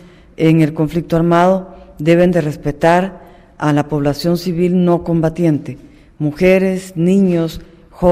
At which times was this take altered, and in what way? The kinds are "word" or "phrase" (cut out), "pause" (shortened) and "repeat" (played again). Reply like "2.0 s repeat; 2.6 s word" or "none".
none